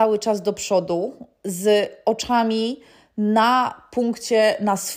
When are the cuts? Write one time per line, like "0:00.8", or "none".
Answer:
none